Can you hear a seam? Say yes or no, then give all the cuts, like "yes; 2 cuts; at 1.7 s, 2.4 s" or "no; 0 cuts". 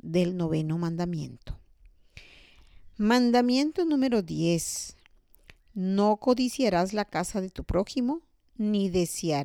no; 0 cuts